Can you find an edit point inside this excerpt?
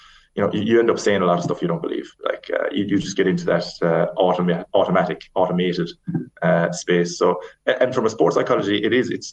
no; 0 cuts

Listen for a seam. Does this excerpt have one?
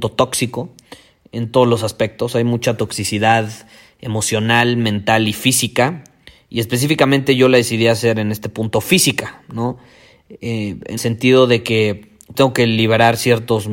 yes; 2 cuts; at 11.0 s, 12.3 s

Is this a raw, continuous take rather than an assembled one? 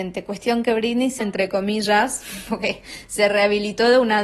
no; 1 cut; at 1.2 s

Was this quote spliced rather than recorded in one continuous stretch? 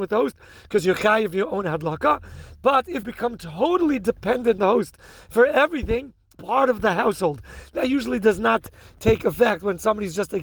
yes; 3 cuts; at 3.0 s, 4.6 s, 6.3 s

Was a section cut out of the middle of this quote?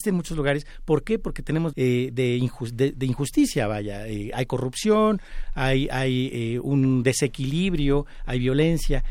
yes; 1 cut; at 1.7 s

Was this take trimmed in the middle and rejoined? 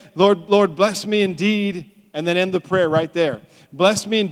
no; 0 cuts

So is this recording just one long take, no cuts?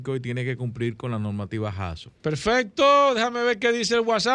no; 1 cut; at 2.2 s

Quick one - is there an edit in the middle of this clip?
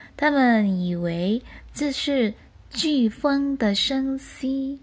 no; 0 cuts

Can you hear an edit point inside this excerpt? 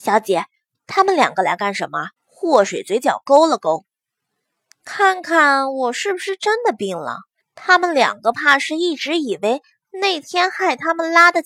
yes; 2 cuts; at 2.2 s, 7.4 s

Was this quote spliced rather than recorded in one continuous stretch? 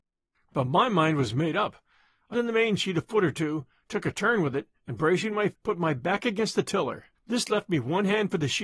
yes; 3 cuts; at 2.3 s, 5.5 s, 7.1 s

